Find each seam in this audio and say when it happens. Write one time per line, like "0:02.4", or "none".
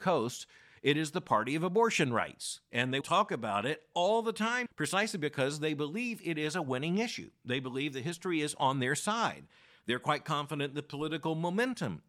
0:03.0
0:04.7